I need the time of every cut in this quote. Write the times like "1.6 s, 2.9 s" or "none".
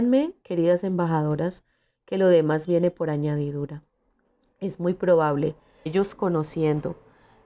5.9 s